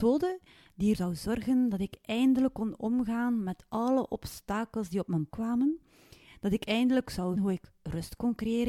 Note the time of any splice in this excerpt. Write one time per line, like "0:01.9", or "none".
0:00.9
0:05.3
0:07.4